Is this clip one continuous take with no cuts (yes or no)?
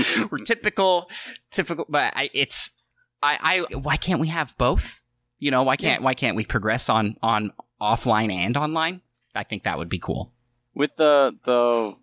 no